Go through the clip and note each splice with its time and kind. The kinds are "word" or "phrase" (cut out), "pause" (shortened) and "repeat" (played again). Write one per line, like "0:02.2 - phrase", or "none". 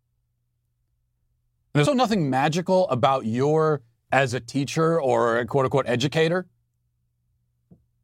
0:01.9 - word
0:04.0 - word